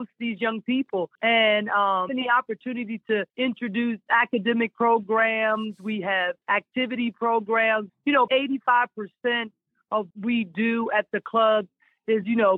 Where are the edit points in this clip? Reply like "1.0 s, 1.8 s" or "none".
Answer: 1.1 s, 2.1 s, 3.3 s, 6.4 s, 7.9 s, 8.3 s, 10.1 s